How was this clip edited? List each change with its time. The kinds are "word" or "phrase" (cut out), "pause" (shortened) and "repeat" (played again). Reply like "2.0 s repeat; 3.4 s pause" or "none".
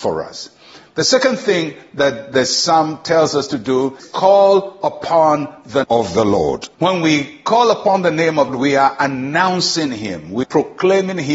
4.0 s phrase; 5.8 s word; 6.7 s pause; 8.5 s phrase; 10.4 s word

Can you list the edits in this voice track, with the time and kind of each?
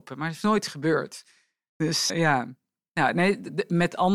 2.1 s word

